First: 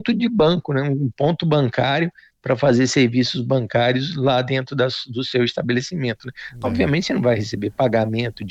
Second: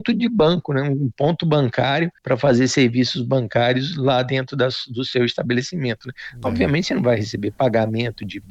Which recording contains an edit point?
second; 1 cut; at 2.2 s

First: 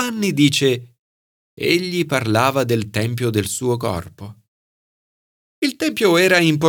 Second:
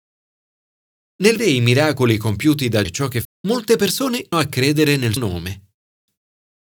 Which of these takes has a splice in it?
second; 5 cuts; at 1.4 s, 2.8 s, 3.2 s, 4.3 s, 5.2 s

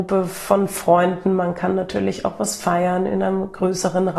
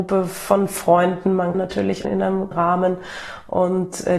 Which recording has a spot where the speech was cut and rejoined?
second; 3 cuts; at 1.5 s, 2.0 s, 2.5 s

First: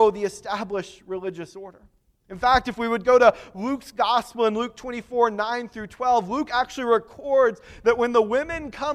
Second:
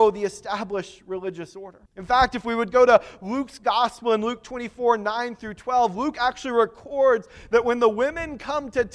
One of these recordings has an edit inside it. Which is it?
second; 1 cut; at 1.9 s

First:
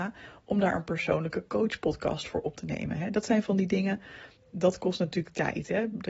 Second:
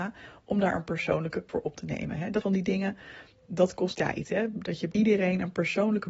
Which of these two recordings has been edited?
second; 4 cuts; at 1.5 s, 2.4 s, 3.9 s, 4.9 s

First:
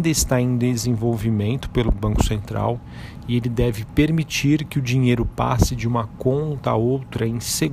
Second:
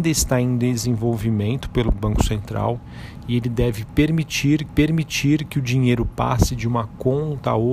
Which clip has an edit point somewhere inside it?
second; 1 cut; at 4.7 s

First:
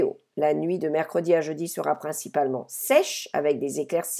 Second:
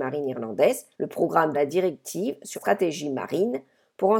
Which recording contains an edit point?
second; 3 cuts; at 0.9 s, 1.5 s, 2.5 s

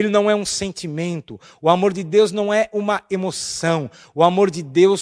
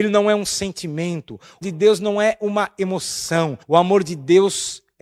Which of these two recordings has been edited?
second; 2 cuts; at 1.6 s, 3.6 s

